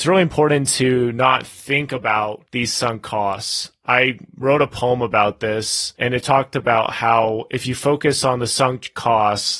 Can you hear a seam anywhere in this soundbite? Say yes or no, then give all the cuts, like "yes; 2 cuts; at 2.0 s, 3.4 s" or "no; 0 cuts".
no; 0 cuts